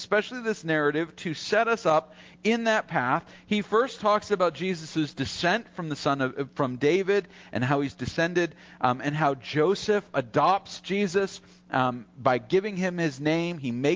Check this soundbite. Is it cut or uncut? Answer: uncut